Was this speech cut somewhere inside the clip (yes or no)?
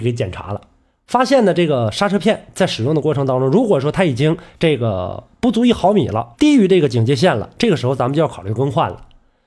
yes